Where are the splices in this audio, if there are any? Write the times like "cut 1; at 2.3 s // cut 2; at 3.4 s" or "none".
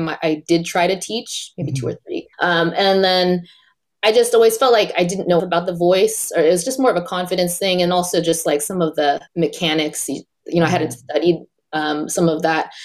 cut 1; at 2.3 s // cut 2; at 5.4 s // cut 3; at 9.3 s